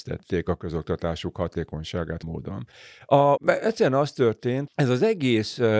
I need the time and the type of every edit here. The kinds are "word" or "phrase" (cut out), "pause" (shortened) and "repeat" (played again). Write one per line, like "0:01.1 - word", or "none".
0:02.2 - word
0:03.4 - word
0:04.7 - word